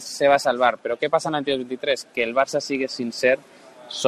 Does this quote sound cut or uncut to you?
uncut